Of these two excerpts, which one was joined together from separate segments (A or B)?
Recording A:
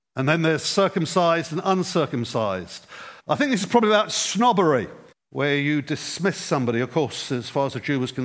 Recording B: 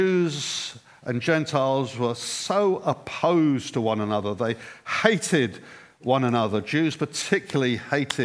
A